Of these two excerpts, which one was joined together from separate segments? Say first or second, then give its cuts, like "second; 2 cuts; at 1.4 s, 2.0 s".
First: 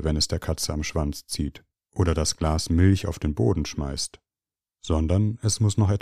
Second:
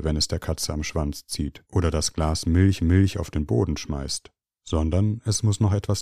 second; 3 cuts; at 1.7 s, 2.8 s, 4.4 s